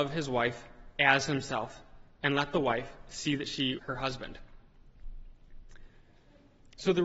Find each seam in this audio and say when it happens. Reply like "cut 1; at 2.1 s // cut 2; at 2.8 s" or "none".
cut 1; at 3.8 s